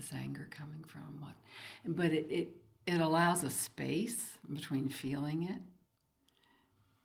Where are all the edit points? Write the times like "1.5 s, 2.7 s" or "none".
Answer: none